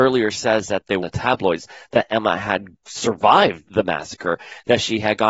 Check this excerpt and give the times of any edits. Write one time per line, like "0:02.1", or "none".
0:01.0
0:03.6